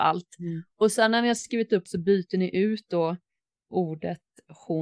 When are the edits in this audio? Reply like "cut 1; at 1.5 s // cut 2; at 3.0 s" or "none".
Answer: cut 1; at 1.9 s